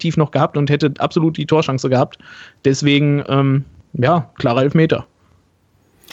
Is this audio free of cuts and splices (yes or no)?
yes